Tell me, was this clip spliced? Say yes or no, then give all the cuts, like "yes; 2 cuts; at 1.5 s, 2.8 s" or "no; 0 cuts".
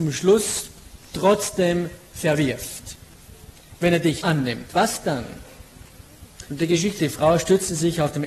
yes; 3 cuts; at 4.2 s, 6.5 s, 7.0 s